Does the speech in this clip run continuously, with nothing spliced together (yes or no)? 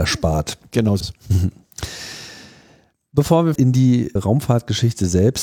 no